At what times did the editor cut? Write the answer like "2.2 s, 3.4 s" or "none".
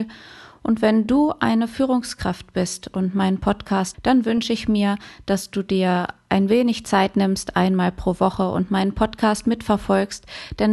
3.9 s